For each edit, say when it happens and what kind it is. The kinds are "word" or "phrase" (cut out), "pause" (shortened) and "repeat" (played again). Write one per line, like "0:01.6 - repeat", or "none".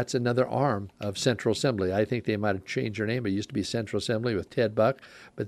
0:00.9 - pause